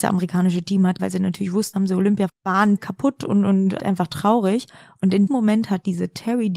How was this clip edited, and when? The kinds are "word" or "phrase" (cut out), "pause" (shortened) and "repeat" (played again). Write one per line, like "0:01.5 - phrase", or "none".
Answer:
0:01.0 - word
0:01.7 - word
0:02.3 - word
0:02.8 - word
0:03.8 - word
0:05.3 - word